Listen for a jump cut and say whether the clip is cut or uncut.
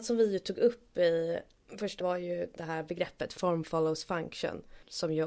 cut